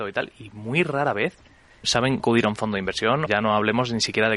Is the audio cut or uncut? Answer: cut